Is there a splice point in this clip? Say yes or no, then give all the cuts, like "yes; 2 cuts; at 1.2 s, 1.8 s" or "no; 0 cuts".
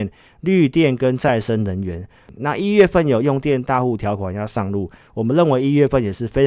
no; 0 cuts